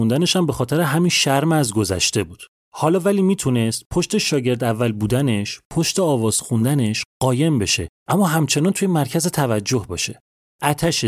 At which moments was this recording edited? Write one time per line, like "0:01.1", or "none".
none